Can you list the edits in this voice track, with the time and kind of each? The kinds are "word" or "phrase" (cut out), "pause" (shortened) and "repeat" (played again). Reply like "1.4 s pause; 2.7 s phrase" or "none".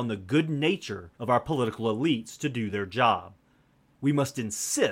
1.1 s pause